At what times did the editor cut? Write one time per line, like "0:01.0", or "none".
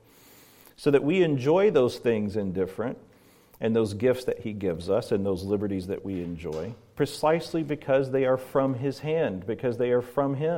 none